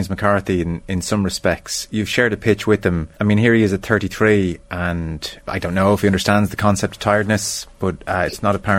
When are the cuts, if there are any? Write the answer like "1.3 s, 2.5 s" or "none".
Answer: 3.1 s, 5.4 s